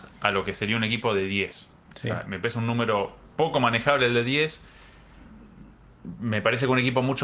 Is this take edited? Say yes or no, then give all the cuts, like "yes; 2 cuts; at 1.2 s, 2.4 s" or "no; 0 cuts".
yes; 1 cut; at 3.3 s